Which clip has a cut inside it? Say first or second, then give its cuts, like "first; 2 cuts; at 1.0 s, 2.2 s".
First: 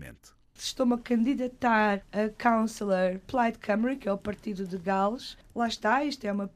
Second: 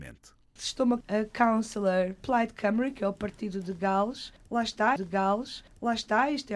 second; 2 cuts; at 1.0 s, 5.0 s